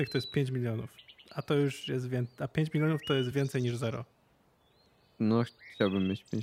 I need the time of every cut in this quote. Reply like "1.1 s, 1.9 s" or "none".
none